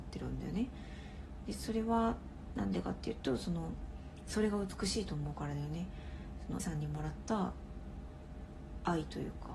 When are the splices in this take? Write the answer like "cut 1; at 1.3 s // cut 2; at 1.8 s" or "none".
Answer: cut 1; at 6.6 s